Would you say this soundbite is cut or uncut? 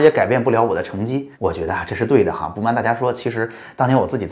cut